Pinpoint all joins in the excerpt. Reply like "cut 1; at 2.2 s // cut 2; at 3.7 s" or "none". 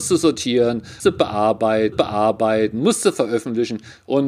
cut 1; at 1.0 s // cut 2; at 1.9 s

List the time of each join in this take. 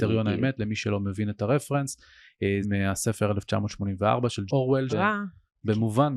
cut 1; at 2.6 s // cut 2; at 4.5 s // cut 3; at 4.9 s

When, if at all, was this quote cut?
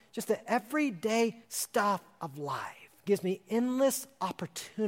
cut 1; at 1.4 s // cut 2; at 3.0 s

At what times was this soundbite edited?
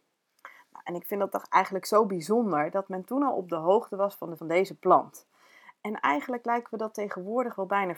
cut 1; at 4.4 s

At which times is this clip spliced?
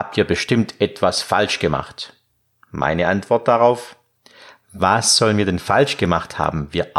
cut 1; at 2.4 s

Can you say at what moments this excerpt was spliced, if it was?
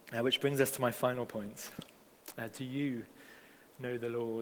none

